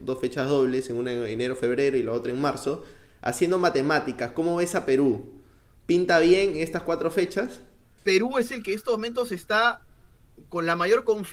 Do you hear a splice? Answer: no; 0 cuts

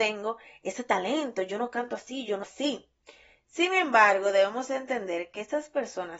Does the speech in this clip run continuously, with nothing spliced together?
no; 1 cut; at 2.4 s

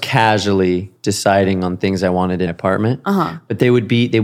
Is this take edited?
yes; 2 cuts; at 1.0 s, 2.5 s

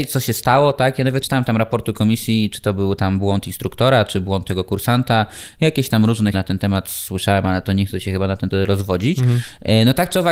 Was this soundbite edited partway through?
yes; 3 cuts; at 1.2 s, 6.3 s, 8.5 s

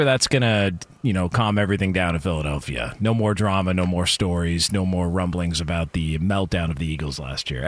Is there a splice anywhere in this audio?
no; 0 cuts

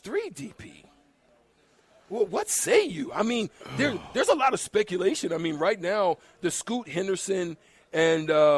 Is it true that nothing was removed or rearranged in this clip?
yes; 0 cuts

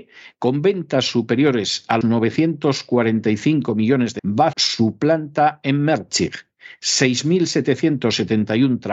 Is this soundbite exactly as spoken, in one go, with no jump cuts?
no; 3 cuts; at 2.0 s, 4.2 s, 4.5 s

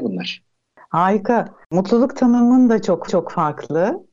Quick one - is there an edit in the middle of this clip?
yes; 2 cuts; at 1.6 s, 3.1 s

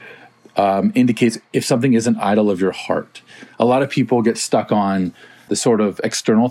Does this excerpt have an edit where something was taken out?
yes; 1 cut; at 5.5 s

